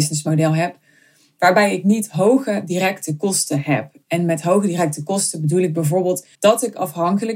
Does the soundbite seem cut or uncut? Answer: cut